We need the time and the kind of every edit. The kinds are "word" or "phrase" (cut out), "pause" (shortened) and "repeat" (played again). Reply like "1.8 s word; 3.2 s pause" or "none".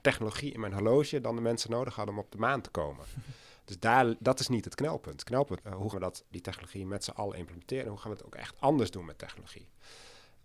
5.6 s word; 5.9 s word; 6.3 s word